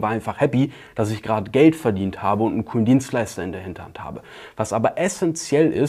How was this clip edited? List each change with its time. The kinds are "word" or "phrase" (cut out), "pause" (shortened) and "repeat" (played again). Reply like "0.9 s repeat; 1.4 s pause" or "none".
none